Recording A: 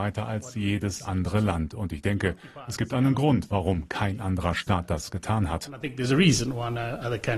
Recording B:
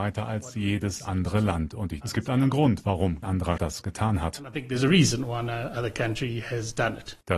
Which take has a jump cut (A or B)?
B